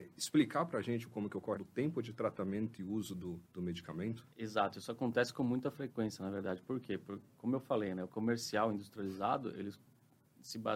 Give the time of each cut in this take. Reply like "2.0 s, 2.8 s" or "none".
1.6 s, 3.4 s, 4.3 s, 8.1 s